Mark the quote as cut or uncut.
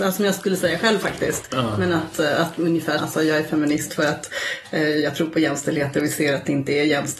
cut